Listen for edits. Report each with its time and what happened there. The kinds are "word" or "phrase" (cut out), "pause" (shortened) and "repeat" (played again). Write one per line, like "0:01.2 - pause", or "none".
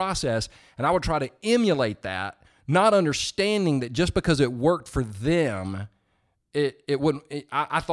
none